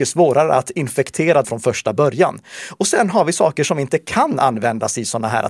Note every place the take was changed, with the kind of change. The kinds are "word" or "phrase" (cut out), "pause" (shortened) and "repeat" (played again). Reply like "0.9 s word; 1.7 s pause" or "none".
1.4 s word